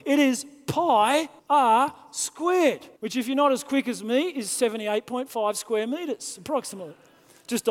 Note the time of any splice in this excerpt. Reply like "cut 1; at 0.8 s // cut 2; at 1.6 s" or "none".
cut 1; at 1.4 s // cut 2; at 3.0 s